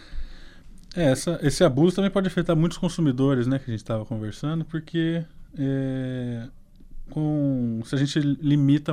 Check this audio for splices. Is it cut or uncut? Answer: uncut